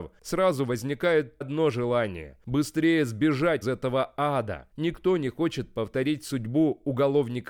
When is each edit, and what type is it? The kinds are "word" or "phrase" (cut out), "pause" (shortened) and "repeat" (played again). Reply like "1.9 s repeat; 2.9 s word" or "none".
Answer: 1.4 s word; 3.6 s word